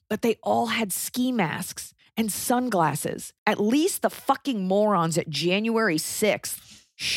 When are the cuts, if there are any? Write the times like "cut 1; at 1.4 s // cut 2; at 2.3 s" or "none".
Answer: cut 1; at 2.0 s // cut 2; at 3.4 s